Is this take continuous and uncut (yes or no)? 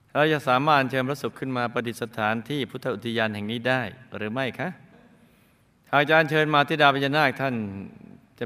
yes